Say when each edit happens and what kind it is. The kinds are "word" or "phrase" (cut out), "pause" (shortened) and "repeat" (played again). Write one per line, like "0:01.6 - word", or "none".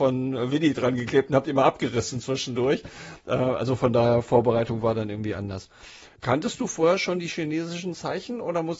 0:06.2 - pause